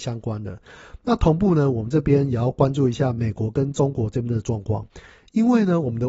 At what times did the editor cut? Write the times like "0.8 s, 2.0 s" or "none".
none